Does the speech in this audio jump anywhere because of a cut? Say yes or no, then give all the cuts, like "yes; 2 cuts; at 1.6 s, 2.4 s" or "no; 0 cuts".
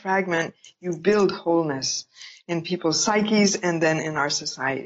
no; 0 cuts